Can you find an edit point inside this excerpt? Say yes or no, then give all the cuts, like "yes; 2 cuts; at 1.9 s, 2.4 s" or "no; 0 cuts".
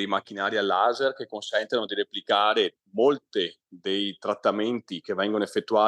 no; 0 cuts